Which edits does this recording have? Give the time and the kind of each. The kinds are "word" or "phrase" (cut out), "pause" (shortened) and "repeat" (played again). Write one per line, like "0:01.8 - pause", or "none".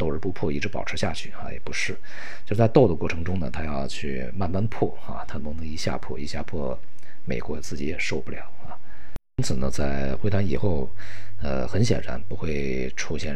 none